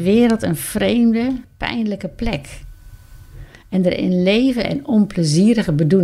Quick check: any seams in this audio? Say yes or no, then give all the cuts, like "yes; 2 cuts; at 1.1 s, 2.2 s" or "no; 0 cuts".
yes; 2 cuts; at 1.4 s, 4.6 s